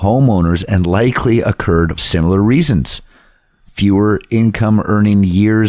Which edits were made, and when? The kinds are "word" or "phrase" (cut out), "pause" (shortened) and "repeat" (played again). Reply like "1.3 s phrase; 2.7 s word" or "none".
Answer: 2.0 s word

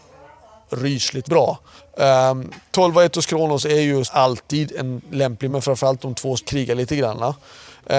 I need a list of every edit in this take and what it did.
1.2 s word; 1.8 s pause; 4.0 s word; 5.5 s word; 6.4 s word

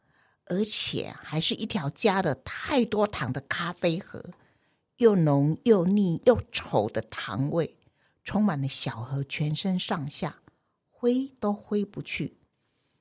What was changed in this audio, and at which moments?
none

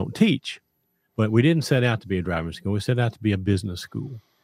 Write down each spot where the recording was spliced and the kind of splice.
none

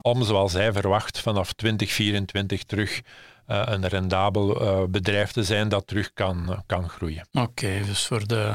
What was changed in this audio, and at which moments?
none

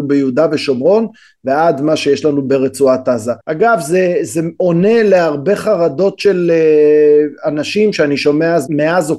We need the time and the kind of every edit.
3.4 s pause

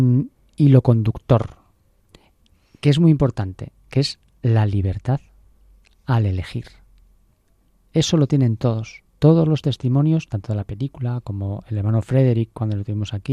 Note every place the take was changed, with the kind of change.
9.1 s pause

